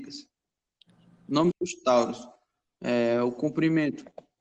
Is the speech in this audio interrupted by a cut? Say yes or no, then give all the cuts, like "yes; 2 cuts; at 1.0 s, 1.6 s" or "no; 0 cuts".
yes; 1 cut; at 1.5 s